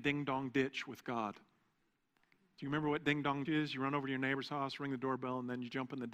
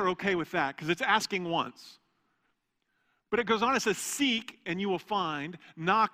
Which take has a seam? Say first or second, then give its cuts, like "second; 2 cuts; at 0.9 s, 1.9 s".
first; 1 cut; at 3.4 s